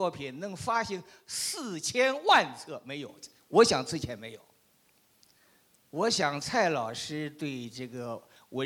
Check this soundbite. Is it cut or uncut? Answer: uncut